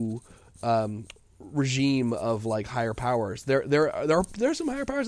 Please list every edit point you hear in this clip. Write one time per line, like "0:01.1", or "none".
none

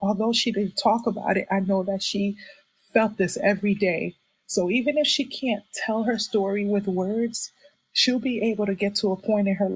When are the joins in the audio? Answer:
none

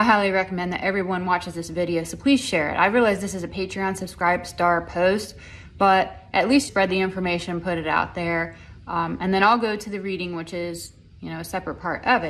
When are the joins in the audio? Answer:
0:06.7

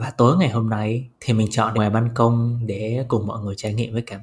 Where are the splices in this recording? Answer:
0:01.1
0:01.7

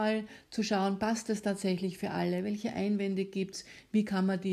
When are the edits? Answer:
none

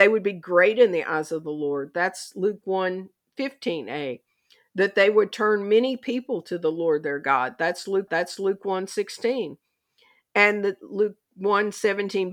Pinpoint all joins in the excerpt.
0:08.1

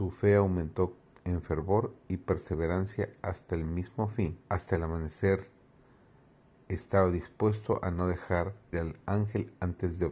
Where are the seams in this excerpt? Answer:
0:04.4
0:08.7

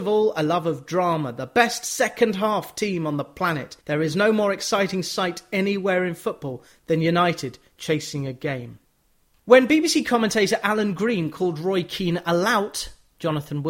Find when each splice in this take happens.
0:03.8

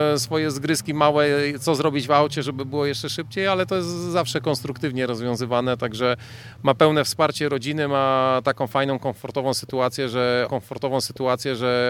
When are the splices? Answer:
0:10.5

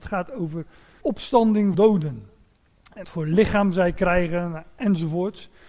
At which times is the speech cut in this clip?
0:01.0
0:01.7
0:03.0

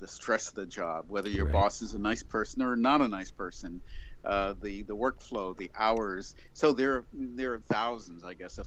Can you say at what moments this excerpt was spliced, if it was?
0:07.6

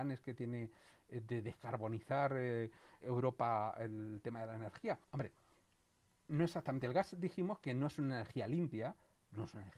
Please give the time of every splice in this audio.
0:03.0
0:05.0

